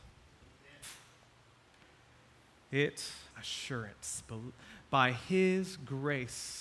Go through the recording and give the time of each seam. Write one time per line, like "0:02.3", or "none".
0:03.3